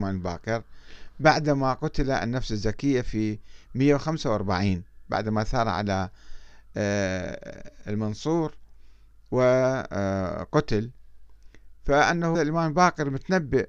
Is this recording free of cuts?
no; 1 cut; at 12.3 s

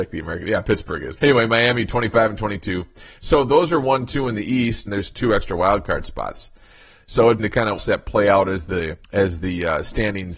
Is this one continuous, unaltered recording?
no; 4 cuts; at 4.9 s, 7.4 s, 7.8 s, 9.0 s

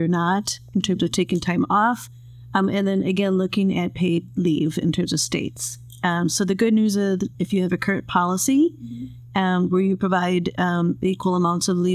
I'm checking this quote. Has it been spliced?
yes; 1 cut; at 7.3 s

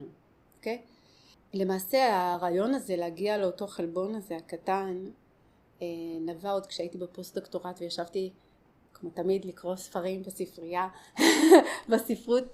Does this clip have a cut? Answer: no; 0 cuts

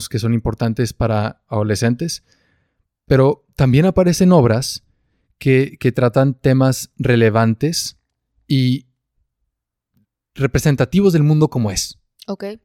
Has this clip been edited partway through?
no; 0 cuts

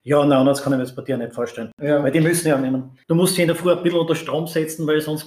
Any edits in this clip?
yes; 1 cut; at 3.0 s

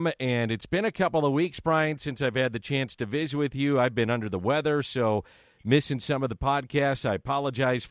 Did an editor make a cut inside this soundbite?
no; 0 cuts

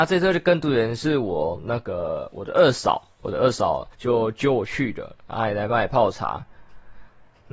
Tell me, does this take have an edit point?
yes; 1 cut; at 3.9 s

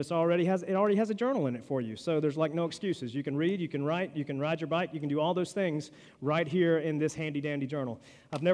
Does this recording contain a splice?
no; 0 cuts

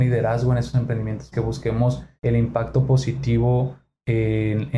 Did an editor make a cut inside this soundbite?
yes; 2 cuts; at 1.3 s, 2.2 s

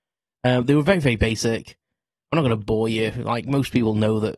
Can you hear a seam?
no; 0 cuts

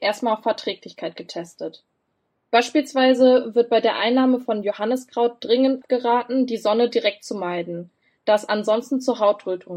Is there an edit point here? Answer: no; 0 cuts

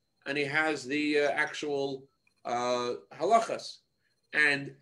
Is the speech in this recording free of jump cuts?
yes; 0 cuts

